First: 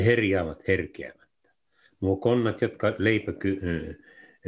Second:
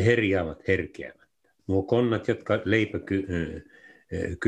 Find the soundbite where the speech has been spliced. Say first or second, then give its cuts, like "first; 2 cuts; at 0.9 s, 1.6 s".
second; 1 cut; at 1.6 s